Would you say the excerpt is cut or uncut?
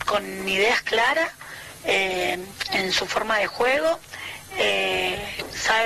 uncut